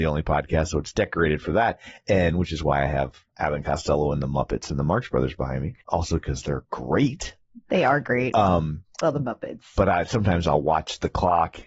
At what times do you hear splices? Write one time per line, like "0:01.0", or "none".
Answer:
0:03.3
0:05.8